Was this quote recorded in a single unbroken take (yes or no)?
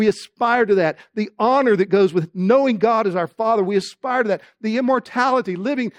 yes